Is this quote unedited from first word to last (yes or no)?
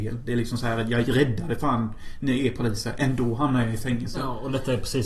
yes